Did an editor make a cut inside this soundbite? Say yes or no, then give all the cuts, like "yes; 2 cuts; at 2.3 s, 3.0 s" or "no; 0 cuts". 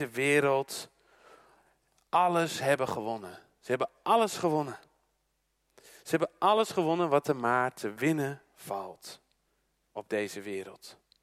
no; 0 cuts